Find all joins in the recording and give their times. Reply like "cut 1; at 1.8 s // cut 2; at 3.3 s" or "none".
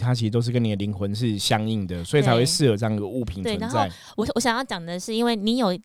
none

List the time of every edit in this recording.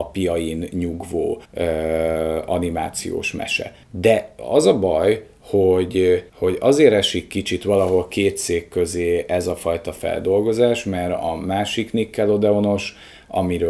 cut 1; at 1.4 s // cut 2; at 3.8 s // cut 3; at 6.3 s

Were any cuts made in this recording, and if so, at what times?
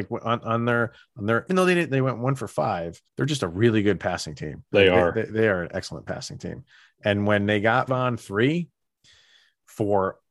cut 1; at 1.5 s // cut 2; at 3.1 s // cut 3; at 4.7 s // cut 4; at 7.9 s

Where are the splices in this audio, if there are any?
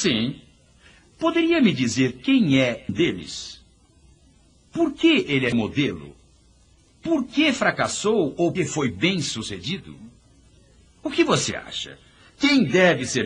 cut 1; at 2.9 s // cut 2; at 5.5 s // cut 3; at 8.6 s

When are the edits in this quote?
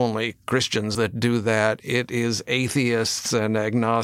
cut 1; at 0.9 s

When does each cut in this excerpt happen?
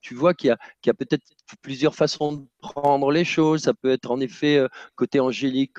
none

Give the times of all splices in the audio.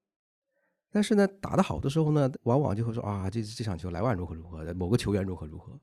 cut 1; at 2.3 s

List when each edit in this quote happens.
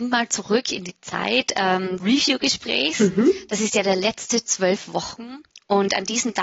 cut 1; at 2.0 s // cut 2; at 4.5 s

